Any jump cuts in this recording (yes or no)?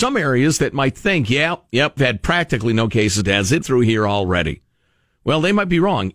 yes